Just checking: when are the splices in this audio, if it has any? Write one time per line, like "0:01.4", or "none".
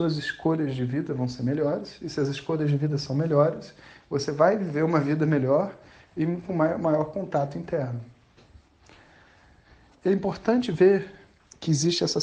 none

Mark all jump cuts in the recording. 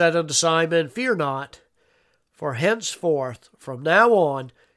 none

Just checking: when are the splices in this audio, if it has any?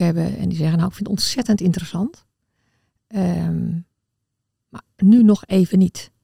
none

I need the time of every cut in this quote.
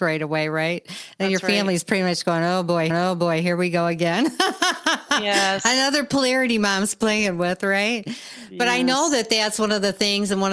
0:02.9

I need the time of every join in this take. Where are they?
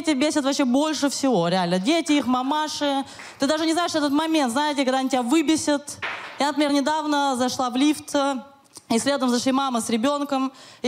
none

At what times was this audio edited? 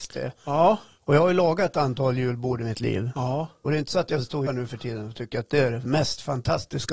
0:04.5

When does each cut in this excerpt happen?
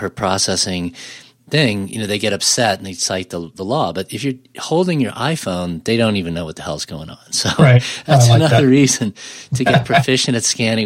none

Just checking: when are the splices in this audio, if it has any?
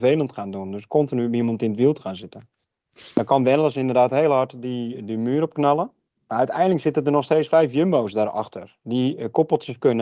0:06.1

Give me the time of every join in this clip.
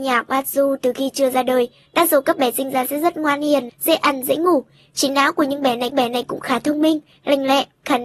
0:03.7
0:05.9

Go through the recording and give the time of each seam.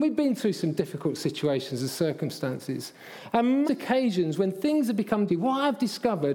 0:03.6
0:05.3

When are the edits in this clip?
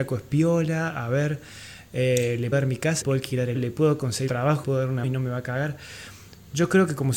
0:02.5
0:03.0
0:03.5
0:04.3
0:04.6
0:05.0

